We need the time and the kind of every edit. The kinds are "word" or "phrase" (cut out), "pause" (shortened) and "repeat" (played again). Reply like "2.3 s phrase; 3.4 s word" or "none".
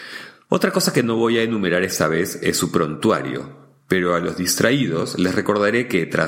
none